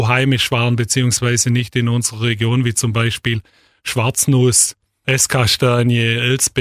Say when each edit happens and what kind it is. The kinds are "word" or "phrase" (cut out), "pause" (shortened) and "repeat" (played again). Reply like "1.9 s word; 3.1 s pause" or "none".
none

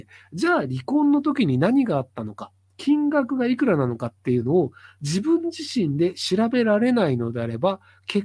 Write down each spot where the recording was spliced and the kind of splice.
none

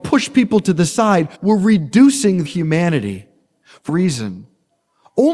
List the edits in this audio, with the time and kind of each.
1.3 s pause; 2.5 s word; 3.9 s word

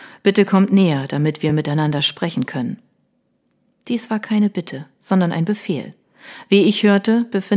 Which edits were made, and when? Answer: none

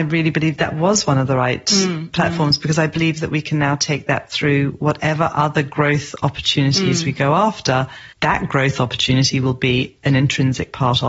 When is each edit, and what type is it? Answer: 8.1 s pause

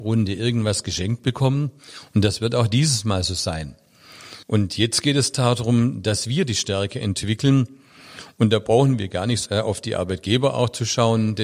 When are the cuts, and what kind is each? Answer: 4.4 s pause; 9.5 s word

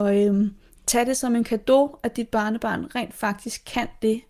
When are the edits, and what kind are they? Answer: none

